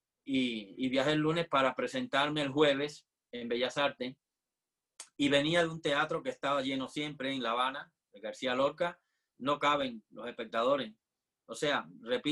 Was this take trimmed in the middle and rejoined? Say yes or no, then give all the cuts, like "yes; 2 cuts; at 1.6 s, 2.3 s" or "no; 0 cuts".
no; 0 cuts